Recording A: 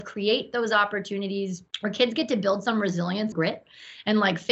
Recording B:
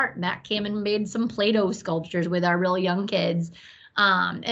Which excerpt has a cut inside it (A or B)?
A